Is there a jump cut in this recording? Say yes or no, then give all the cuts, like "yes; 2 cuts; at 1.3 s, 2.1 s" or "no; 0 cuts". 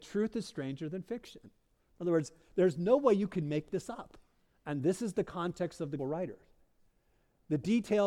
yes; 1 cut; at 6.0 s